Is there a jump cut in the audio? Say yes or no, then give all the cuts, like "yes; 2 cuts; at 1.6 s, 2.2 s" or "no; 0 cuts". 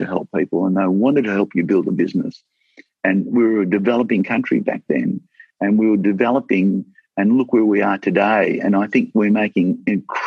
no; 0 cuts